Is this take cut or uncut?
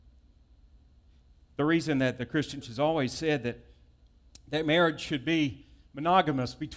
cut